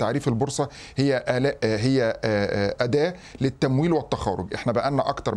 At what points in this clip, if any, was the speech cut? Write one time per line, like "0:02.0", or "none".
none